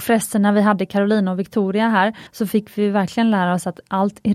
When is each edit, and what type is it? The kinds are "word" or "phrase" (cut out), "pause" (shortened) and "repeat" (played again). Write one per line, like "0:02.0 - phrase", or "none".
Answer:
0:02.3 - pause